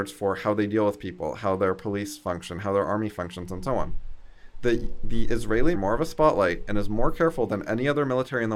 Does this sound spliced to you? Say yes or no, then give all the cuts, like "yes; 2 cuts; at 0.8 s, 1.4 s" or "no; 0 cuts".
yes; 1 cut; at 5.7 s